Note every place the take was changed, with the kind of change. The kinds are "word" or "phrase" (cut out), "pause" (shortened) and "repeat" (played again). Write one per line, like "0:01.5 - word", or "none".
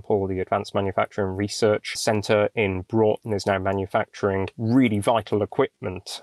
none